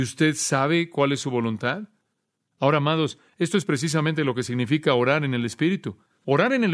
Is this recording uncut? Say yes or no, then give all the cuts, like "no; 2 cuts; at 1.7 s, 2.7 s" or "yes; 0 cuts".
yes; 0 cuts